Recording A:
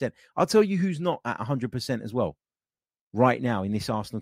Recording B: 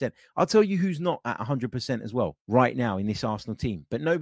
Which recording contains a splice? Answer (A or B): B